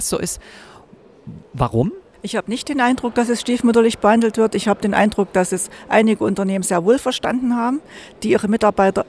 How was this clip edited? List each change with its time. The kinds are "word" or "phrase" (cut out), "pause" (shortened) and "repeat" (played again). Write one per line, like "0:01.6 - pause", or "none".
0:02.1 - pause